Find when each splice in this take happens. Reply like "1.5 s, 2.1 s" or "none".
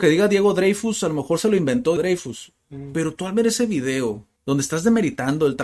2.0 s, 4.4 s